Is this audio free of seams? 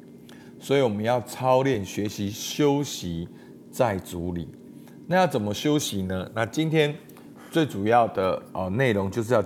yes; 0 cuts

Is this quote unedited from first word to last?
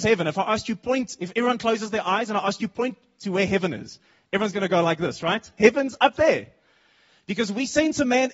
yes; 0 cuts

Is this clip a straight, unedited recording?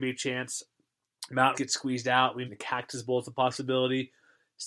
no; 2 cuts; at 1.5 s, 2.5 s

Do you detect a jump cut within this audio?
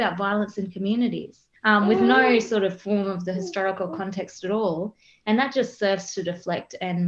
no; 0 cuts

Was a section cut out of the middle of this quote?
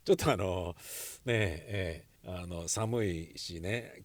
yes; 1 cut; at 2.2 s

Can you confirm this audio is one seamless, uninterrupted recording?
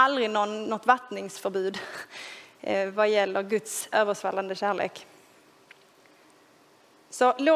yes; 0 cuts

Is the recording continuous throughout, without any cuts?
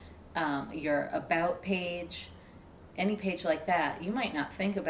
yes; 0 cuts

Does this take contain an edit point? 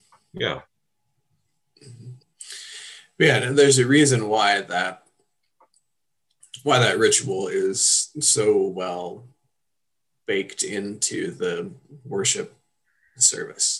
no; 0 cuts

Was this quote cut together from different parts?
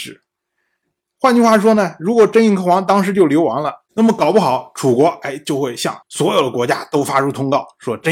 yes; 1 cut; at 6.0 s

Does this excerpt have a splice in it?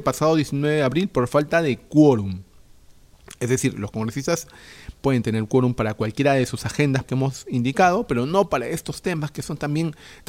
yes; 1 cut; at 7.0 s

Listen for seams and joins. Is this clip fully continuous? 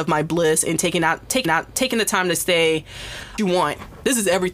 no; 2 cuts; at 1.4 s, 3.4 s

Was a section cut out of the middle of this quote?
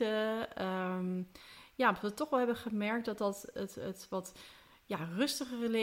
no; 0 cuts

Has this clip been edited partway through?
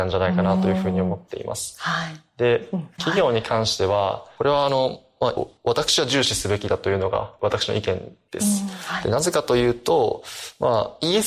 yes; 1 cut; at 5.4 s

